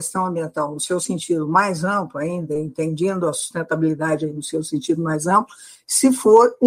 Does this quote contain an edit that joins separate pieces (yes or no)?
no